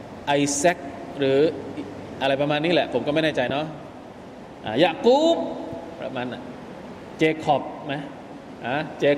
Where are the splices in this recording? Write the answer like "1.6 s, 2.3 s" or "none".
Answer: none